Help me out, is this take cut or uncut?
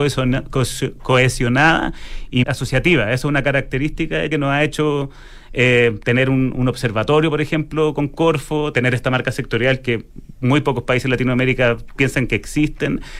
cut